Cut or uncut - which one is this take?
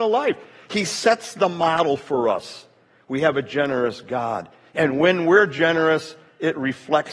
uncut